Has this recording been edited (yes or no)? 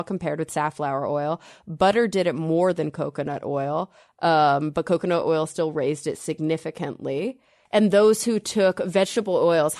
no